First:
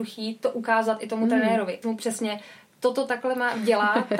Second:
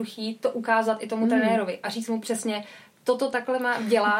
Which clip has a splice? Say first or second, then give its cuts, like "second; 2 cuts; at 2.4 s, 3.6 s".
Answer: first; 1 cut; at 1.8 s